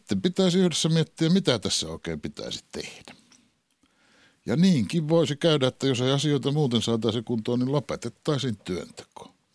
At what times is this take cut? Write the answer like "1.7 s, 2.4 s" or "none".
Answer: none